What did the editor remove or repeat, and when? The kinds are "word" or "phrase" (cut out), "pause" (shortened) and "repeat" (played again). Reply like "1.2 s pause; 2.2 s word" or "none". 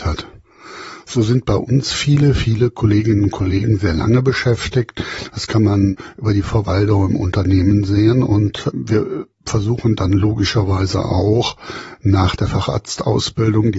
none